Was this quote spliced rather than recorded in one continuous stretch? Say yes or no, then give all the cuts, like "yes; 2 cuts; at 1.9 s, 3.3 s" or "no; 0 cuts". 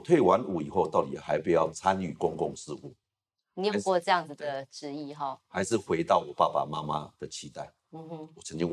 no; 0 cuts